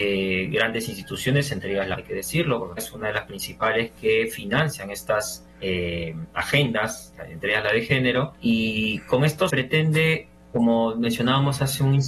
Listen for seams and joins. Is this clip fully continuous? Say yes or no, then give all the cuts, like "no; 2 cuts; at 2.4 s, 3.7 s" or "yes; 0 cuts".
no; 5 cuts; at 1.9 s, 2.8 s, 5.5 s, 8.4 s, 9.5 s